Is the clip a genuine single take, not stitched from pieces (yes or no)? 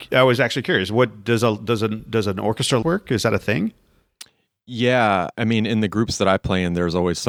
no